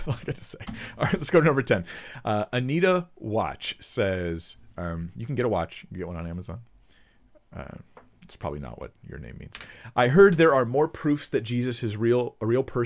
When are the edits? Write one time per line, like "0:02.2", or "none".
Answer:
none